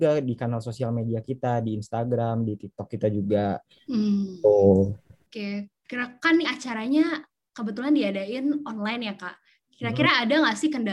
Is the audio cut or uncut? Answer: cut